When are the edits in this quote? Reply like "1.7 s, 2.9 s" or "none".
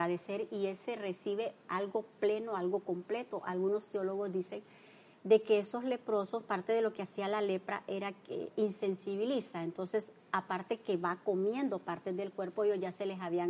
none